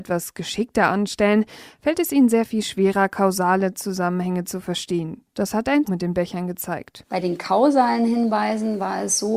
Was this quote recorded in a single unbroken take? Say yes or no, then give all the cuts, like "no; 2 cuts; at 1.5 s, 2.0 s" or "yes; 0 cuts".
no; 1 cut; at 5.8 s